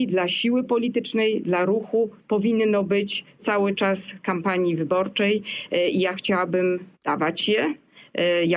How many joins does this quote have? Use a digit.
2